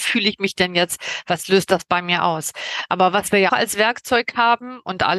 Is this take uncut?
no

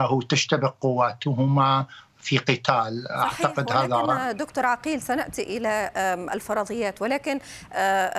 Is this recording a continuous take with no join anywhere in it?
yes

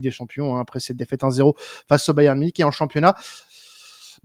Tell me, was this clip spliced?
no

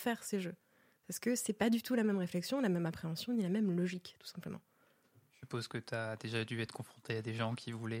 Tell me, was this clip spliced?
no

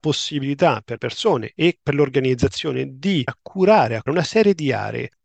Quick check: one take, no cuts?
no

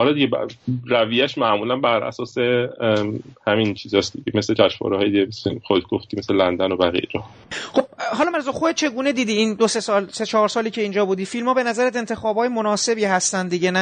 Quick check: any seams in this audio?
yes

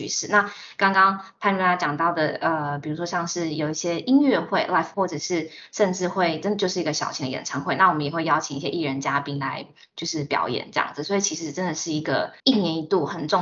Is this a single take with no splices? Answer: no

